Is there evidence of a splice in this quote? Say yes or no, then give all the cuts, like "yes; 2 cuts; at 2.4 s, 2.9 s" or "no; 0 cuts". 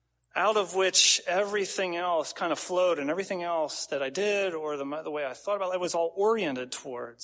no; 0 cuts